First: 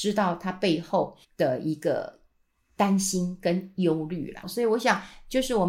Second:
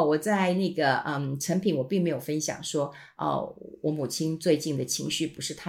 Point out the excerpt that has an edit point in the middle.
first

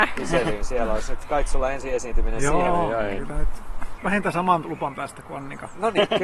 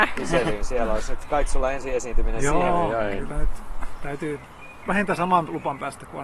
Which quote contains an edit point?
first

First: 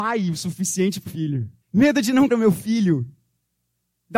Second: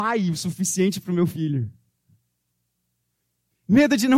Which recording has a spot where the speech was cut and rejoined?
first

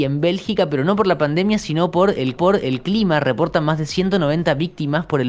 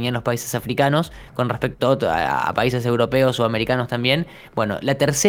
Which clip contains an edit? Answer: first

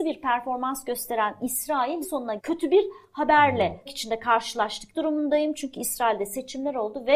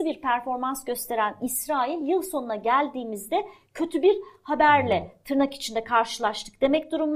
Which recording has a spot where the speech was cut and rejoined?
first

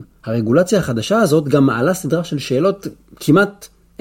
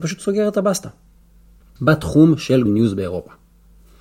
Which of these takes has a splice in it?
second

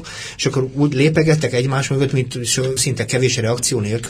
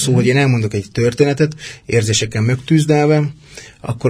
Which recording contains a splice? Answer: first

